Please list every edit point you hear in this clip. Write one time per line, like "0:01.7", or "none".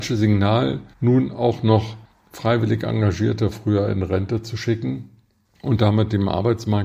0:00.9
0:02.1
0:05.4